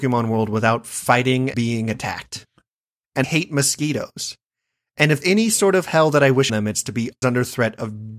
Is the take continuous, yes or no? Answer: no